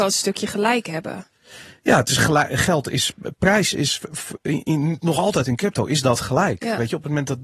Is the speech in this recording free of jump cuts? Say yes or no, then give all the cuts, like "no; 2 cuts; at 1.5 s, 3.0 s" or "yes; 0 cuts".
yes; 0 cuts